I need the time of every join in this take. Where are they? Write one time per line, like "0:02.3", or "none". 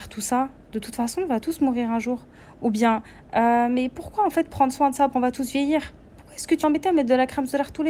0:05.1
0:06.6